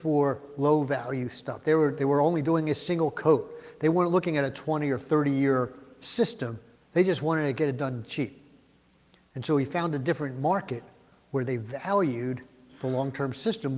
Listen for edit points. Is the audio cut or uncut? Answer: cut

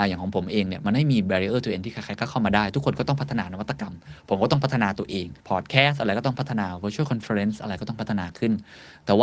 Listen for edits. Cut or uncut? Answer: cut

